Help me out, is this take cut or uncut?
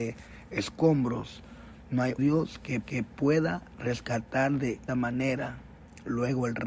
cut